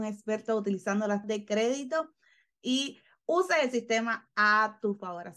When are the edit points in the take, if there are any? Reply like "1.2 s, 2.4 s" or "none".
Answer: 1.2 s

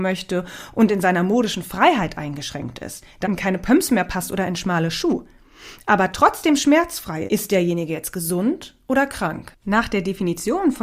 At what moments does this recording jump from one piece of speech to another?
3.2 s, 7.3 s, 9.6 s

